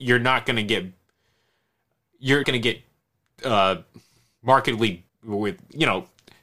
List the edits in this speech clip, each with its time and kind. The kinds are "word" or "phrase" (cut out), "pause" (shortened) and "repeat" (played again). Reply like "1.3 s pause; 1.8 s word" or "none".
2.4 s word; 5.1 s word